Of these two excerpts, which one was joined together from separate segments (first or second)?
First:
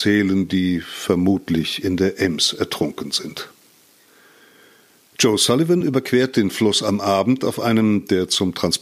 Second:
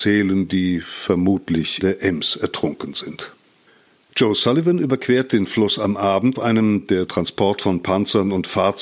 second